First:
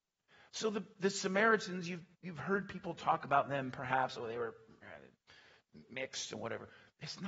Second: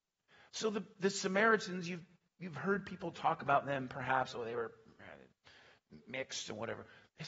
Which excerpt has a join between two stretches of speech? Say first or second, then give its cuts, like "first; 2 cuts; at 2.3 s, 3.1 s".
first; 1 cut; at 2.1 s